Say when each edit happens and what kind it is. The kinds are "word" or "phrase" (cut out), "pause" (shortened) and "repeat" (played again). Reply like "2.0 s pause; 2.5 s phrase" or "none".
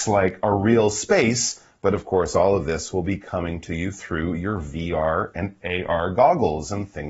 none